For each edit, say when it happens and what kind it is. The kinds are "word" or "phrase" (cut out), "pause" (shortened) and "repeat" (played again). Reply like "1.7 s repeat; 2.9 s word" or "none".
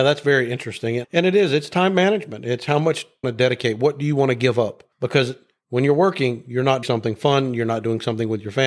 1.0 s word; 3.2 s phrase; 4.9 s pause; 6.8 s word

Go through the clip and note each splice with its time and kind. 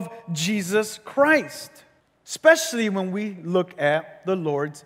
2.0 s pause

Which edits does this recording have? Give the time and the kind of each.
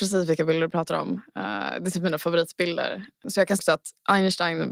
3.6 s word

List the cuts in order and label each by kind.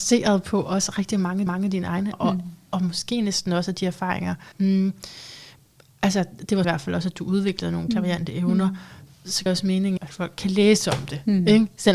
1.5 s repeat; 2.1 s word; 4.5 s pause; 6.6 s phrase; 7.9 s word; 9.5 s word; 10.0 s word

